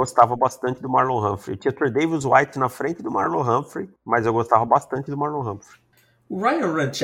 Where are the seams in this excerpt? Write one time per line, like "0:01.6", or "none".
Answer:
0:04.0